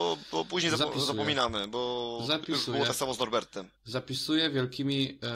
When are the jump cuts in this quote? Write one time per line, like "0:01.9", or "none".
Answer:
0:03.8